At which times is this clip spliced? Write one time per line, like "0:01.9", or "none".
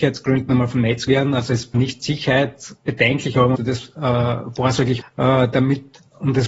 0:01.1
0:01.7
0:03.6
0:05.0